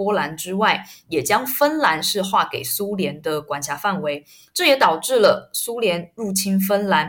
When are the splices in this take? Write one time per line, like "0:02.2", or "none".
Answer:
none